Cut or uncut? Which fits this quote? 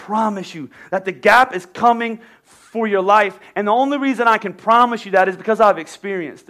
uncut